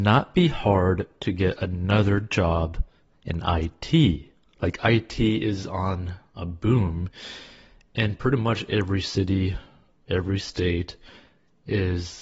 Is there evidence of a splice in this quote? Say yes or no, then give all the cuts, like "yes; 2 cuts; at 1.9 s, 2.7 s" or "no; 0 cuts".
no; 0 cuts